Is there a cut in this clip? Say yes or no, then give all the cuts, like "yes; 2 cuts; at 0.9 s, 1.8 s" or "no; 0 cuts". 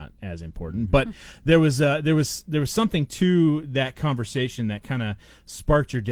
no; 0 cuts